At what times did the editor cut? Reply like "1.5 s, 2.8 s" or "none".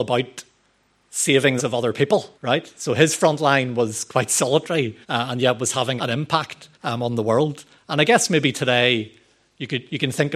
1.6 s, 2.4 s, 5.0 s, 6.0 s, 6.7 s